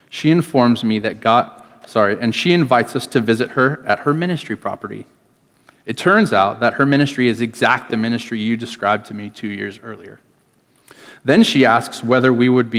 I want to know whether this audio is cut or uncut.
cut